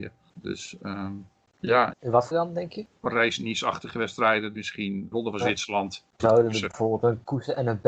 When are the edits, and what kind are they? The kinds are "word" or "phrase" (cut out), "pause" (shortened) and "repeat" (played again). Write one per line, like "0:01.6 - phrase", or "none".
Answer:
0:01.9 - word
0:02.3 - word
0:04.5 - word
0:05.1 - word
0:06.2 - word